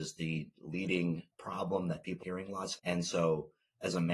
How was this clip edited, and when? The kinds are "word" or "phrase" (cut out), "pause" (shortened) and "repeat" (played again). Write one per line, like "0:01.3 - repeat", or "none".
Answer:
0:01.3 - word
0:02.2 - word
0:02.8 - word